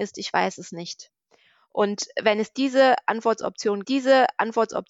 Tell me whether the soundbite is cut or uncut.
cut